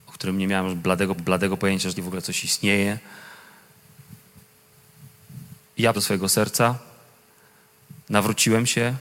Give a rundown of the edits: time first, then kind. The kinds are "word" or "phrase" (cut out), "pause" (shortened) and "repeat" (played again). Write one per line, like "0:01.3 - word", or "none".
0:01.2 - repeat
0:01.9 - word
0:05.9 - phrase
0:08.0 - pause